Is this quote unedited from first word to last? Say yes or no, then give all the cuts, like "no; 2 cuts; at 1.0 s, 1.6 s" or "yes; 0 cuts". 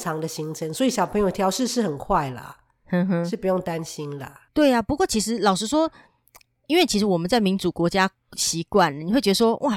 no; 1 cut; at 4.5 s